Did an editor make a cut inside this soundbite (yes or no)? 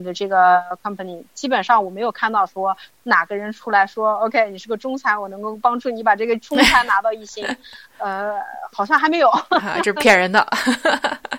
no